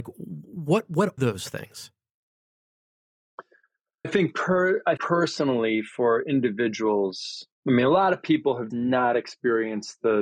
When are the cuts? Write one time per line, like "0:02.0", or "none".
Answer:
0:01.2
0:04.0
0:05.0
0:07.5
0:08.7